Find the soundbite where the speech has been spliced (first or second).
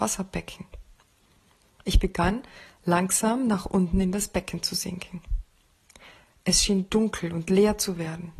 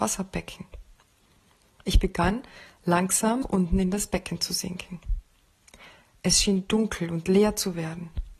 second